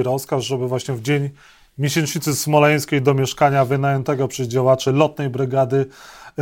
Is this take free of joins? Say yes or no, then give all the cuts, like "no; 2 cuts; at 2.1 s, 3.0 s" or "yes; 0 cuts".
yes; 0 cuts